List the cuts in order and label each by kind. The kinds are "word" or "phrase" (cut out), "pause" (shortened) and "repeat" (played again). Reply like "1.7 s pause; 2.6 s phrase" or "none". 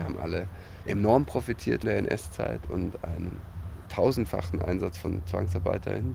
1.8 s word